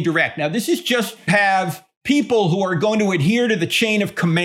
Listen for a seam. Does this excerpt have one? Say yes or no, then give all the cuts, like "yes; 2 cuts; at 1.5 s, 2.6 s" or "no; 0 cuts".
yes; 1 cut; at 1.3 s